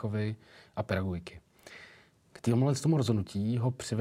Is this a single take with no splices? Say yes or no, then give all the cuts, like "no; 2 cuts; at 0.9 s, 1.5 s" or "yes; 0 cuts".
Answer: yes; 0 cuts